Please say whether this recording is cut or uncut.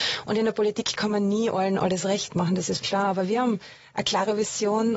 cut